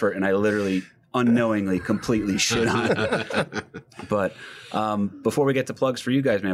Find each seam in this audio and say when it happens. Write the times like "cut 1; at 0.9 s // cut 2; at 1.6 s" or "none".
none

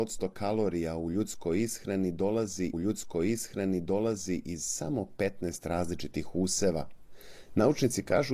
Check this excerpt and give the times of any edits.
cut 1; at 2.7 s

